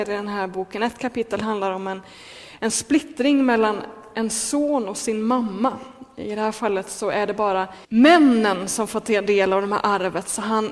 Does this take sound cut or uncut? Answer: cut